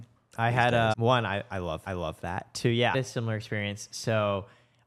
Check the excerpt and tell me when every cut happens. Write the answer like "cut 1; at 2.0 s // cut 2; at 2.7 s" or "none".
cut 1; at 0.9 s // cut 2; at 1.9 s // cut 3; at 2.9 s